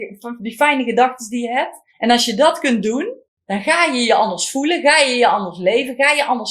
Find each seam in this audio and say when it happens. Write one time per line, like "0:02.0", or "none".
0:01.9
0:03.3